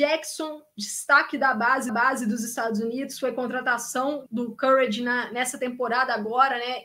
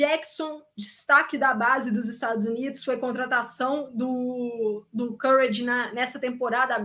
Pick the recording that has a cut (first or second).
first